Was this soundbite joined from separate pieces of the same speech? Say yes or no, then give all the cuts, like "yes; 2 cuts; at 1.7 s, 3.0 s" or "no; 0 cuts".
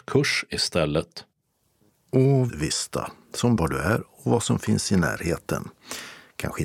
yes; 2 cuts; at 2.5 s, 3.6 s